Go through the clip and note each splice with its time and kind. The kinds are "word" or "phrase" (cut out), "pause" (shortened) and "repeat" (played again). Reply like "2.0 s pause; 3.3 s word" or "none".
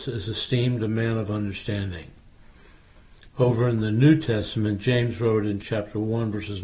5.6 s word